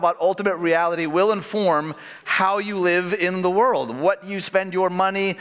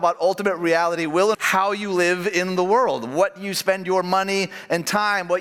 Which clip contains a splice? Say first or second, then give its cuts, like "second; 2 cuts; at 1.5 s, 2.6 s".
second; 1 cut; at 1.3 s